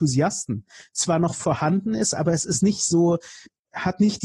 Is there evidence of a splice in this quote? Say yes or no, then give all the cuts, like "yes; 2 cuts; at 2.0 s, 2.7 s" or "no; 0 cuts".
no; 0 cuts